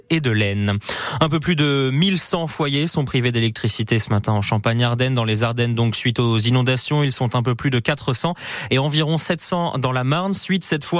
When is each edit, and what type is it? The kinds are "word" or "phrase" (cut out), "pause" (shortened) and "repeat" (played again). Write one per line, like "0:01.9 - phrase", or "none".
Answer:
none